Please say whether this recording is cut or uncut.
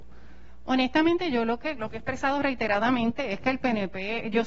cut